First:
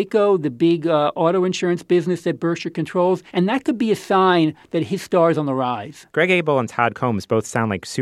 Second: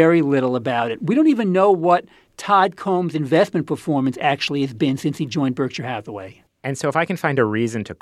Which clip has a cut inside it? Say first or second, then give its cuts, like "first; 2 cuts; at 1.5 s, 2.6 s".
first; 2 cuts; at 3.3 s, 6.1 s